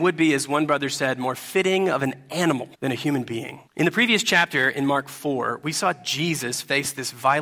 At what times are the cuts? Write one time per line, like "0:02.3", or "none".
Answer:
0:02.7
0:03.7

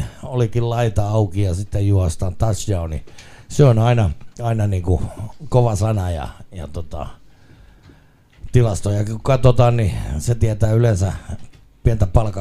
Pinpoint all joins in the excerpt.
0:04.3

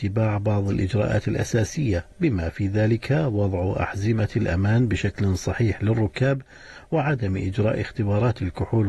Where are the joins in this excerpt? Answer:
none

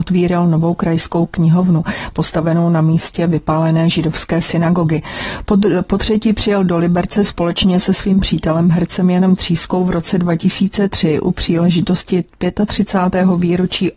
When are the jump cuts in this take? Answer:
none

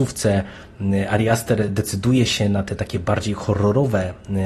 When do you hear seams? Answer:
none

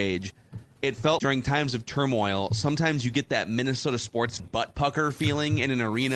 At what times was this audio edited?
0:01.2
0:04.4

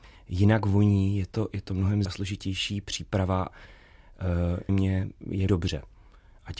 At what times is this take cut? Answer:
0:02.0
0:03.5
0:04.7
0:05.5

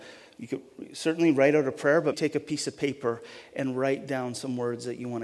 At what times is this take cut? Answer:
0:02.1

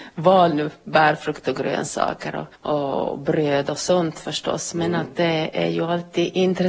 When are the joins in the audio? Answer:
0:02.5

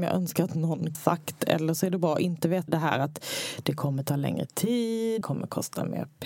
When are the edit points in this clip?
0:00.9
0:02.7
0:05.2

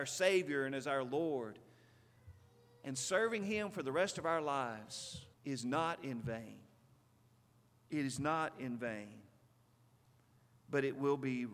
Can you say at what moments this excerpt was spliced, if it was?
0:05.3

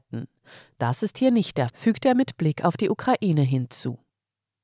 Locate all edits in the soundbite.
0:01.7

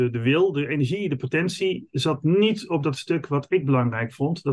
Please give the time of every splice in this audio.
none

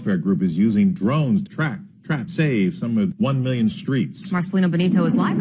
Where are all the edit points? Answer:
0:01.5
0:02.3
0:03.1
0:03.7

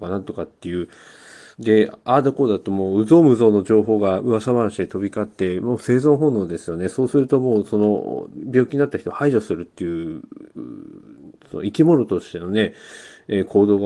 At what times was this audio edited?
0:01.5
0:10.5

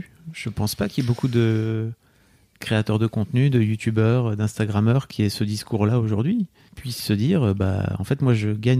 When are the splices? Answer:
0:06.7

